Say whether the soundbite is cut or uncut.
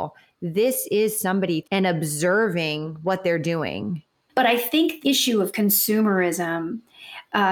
cut